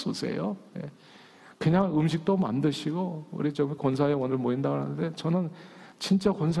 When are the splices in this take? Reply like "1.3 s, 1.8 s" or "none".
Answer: none